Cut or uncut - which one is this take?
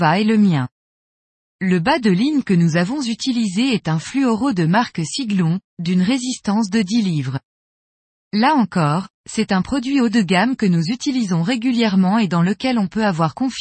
uncut